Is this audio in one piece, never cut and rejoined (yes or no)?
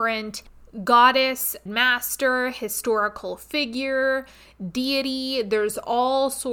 no